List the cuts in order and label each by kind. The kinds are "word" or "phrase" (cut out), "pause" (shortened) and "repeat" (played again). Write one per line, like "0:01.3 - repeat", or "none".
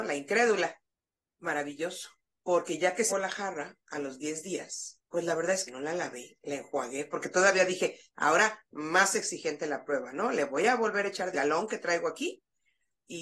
0:00.9 - pause
0:03.1 - word
0:05.1 - pause
0:05.7 - phrase
0:11.3 - word